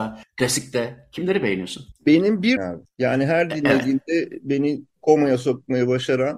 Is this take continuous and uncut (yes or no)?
no